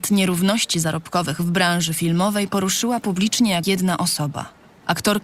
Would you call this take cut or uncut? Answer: cut